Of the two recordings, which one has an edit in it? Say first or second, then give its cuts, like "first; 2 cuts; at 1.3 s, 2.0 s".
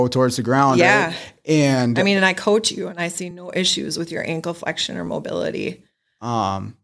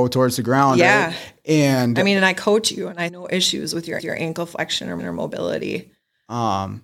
second; 3 cuts; at 3.1 s, 4.0 s, 5.0 s